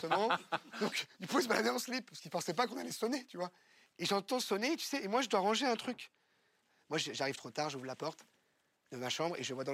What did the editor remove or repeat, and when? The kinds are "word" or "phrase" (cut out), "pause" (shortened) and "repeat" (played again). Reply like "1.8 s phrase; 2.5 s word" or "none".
none